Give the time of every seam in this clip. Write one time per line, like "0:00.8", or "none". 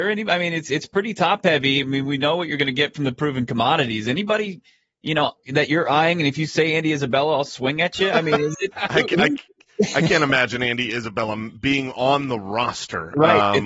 0:08.7